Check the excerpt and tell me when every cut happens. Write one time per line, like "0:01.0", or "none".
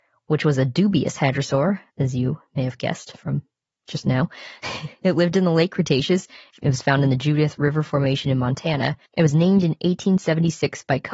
0:01.9
0:06.5
0:09.1